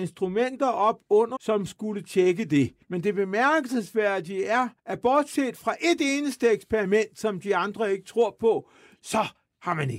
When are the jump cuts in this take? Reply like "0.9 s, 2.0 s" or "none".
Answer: 1.4 s, 2.8 s, 4.8 s